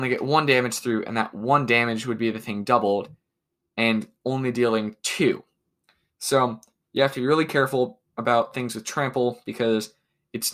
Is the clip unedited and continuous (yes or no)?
yes